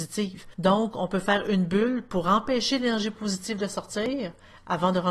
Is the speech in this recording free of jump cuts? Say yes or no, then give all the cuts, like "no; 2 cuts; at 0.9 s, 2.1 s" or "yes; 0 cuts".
yes; 0 cuts